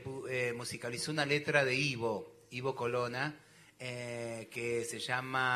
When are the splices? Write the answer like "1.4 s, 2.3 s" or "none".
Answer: none